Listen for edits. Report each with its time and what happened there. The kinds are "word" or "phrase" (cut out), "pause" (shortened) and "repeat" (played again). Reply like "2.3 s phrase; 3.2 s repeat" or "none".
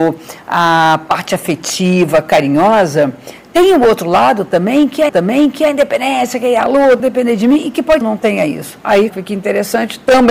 5.1 s repeat; 7.0 s word; 8.0 s phrase; 9.1 s word

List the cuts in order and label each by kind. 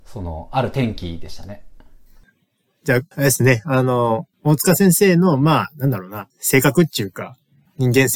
3.1 s pause; 4.3 s pause; 6.3 s pause

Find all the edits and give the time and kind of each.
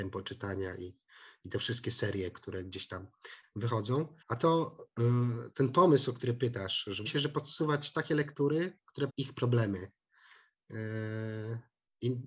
4.2 s pause; 7.1 s phrase; 9.1 s word

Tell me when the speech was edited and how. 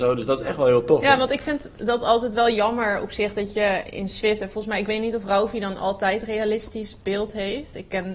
none

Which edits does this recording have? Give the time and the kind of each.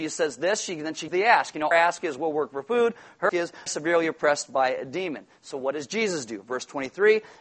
1.1 s word; 1.7 s word; 3.3 s word; 3.7 s phrase

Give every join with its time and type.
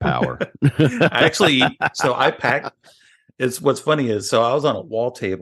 none

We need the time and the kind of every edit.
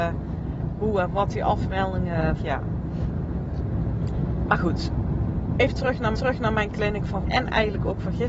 2.4 s phrase; 6.1 s repeat; 7.2 s word

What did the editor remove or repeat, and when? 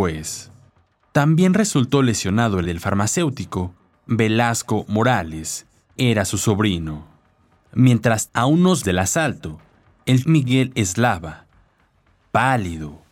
2.6 s word; 4.1 s word; 6.0 s word; 8.3 s word; 8.8 s word; 10.2 s word

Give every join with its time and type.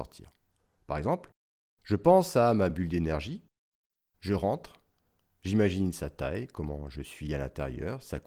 none

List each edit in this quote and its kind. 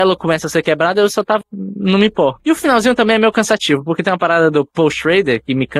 1.4 s word

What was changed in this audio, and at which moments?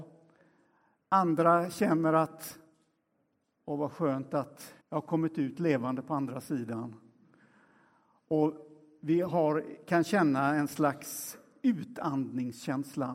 4.8 s pause

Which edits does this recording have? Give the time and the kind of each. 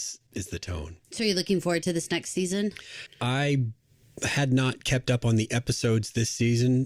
1.0 s pause

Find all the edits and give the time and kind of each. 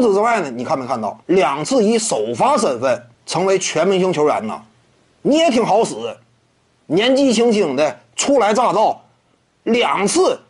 1.2 s pause; 3.1 s pause

